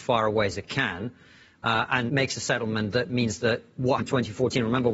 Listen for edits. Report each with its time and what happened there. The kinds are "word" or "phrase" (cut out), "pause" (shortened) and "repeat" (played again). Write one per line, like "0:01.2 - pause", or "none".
0:02.1 - word
0:04.0 - word